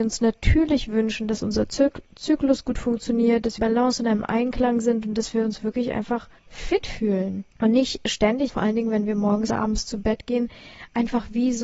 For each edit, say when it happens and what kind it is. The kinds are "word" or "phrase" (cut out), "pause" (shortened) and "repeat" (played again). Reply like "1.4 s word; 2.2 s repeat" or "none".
3.6 s phrase; 6.4 s pause; 7.5 s pause; 8.5 s word; 9.5 s phrase